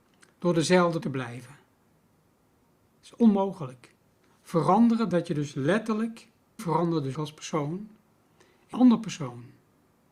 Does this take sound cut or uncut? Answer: cut